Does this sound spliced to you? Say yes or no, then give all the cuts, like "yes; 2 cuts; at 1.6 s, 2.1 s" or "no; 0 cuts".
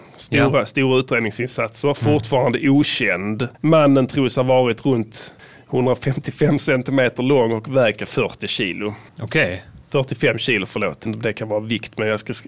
yes; 6 cuts; at 3.5 s, 5.4 s, 8.0 s, 9.1 s, 9.8 s, 11.1 s